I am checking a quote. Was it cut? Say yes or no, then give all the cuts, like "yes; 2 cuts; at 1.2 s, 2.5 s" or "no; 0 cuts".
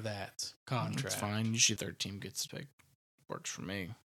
yes; 2 cuts; at 1.8 s, 2.5 s